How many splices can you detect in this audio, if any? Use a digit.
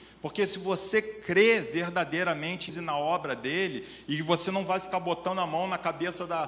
1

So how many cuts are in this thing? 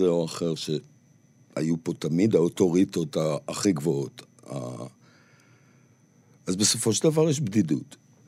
0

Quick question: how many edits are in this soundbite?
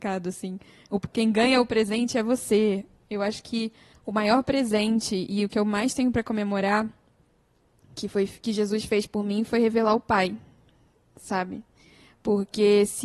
1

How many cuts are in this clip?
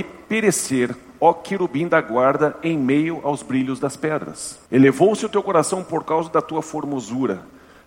1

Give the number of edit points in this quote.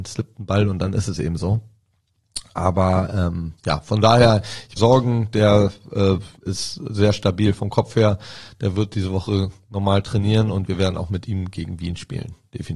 3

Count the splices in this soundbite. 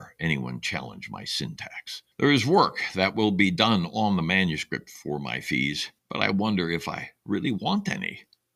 2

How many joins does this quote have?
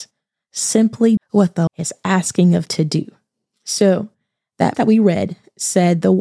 4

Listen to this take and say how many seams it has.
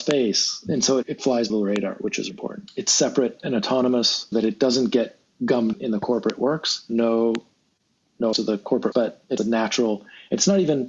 7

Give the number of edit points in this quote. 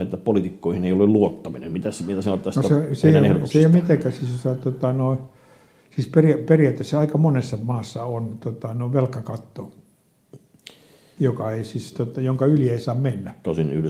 0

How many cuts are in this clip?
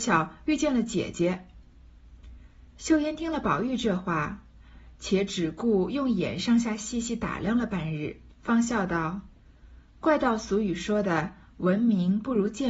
2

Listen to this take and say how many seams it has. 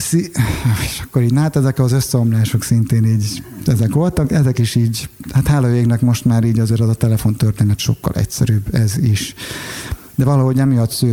0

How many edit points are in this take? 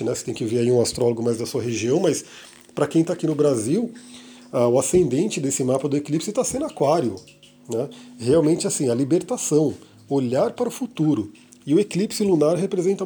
0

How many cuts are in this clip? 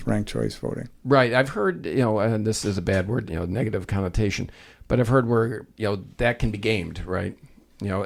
2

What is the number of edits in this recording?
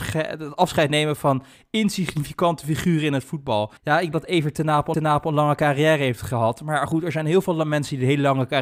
3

